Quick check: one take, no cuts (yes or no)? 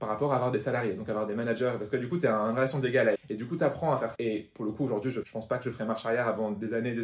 no